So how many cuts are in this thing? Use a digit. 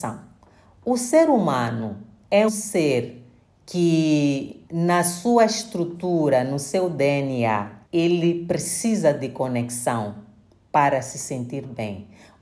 3